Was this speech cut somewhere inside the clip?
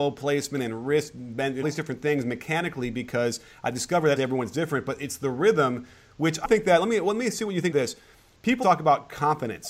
yes; 5 cuts; at 1.6 s, 4.2 s, 6.4 s, 7.7 s, 8.6 s

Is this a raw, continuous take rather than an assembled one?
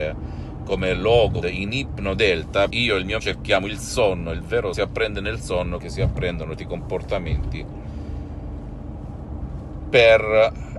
no; 6 cuts; at 1.4 s, 2.7 s, 3.2 s, 4.7 s, 5.8 s, 6.6 s

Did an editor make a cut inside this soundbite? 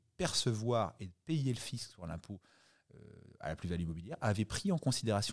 no; 0 cuts

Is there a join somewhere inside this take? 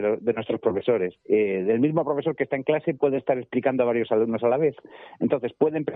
yes; 1 cut; at 1.2 s

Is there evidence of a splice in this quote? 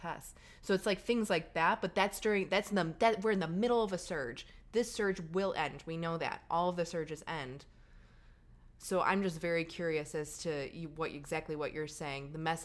no; 0 cuts

